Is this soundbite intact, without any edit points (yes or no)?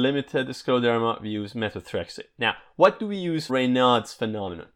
no